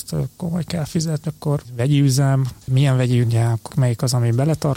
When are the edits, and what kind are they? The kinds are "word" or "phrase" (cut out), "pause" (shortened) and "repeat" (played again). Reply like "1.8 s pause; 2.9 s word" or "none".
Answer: 1.2 s word; 3.2 s word; 3.7 s word